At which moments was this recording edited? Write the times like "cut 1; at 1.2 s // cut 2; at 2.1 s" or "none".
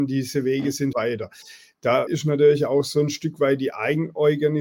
cut 1; at 0.9 s // cut 2; at 2.1 s